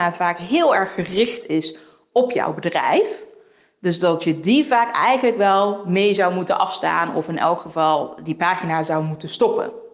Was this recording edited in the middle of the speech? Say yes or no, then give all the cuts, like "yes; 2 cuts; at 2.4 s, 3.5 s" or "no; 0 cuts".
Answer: no; 0 cuts